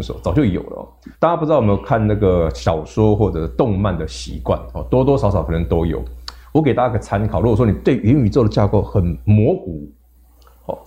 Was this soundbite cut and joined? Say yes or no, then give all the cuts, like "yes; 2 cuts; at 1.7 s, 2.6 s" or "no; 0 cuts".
yes; 1 cut; at 1.1 s